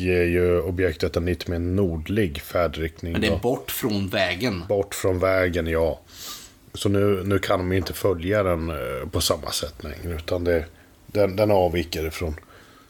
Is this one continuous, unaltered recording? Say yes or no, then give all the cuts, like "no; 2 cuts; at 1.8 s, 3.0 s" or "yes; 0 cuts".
yes; 0 cuts